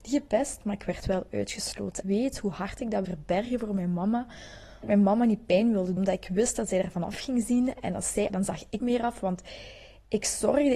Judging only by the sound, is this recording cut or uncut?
cut